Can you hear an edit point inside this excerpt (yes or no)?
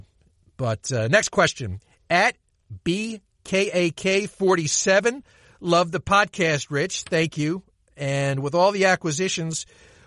no